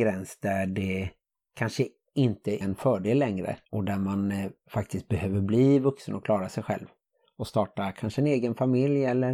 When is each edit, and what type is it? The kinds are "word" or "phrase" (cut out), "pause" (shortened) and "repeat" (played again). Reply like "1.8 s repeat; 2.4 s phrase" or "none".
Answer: 2.6 s word; 3.6 s pause